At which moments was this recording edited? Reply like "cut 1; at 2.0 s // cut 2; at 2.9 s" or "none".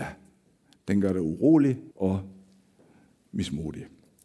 cut 1; at 1.9 s